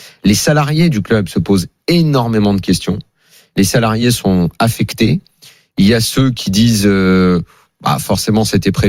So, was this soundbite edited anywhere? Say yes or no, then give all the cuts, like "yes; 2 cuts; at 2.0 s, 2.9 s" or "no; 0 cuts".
no; 0 cuts